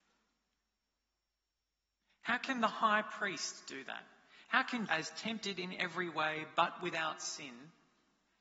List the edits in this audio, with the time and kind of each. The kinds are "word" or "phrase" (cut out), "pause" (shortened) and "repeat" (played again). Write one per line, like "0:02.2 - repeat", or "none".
0:04.9 - word